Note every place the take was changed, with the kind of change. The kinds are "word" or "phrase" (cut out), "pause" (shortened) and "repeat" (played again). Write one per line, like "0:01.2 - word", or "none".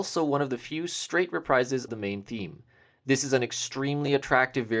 0:01.9 - word